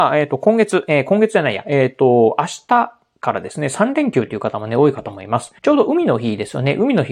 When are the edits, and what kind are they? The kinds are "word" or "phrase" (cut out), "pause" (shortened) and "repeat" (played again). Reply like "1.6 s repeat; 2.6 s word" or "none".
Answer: 5.6 s pause